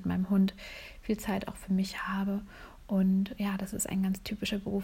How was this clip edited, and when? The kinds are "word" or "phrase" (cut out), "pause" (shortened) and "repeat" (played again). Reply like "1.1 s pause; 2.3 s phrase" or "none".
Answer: none